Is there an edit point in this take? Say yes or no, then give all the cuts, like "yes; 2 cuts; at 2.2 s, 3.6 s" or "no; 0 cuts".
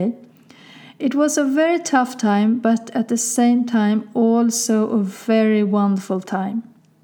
no; 0 cuts